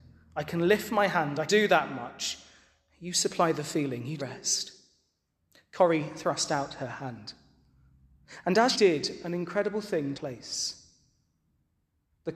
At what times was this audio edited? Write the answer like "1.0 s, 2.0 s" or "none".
1.5 s, 4.2 s, 8.7 s, 10.1 s